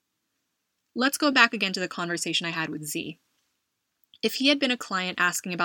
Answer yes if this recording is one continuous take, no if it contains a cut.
yes